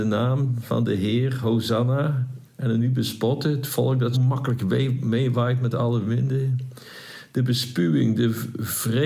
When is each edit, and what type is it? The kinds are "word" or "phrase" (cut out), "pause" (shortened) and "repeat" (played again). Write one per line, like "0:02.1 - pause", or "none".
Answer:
0:02.5 - pause
0:04.1 - word